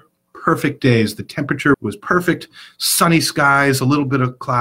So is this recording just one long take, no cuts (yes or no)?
no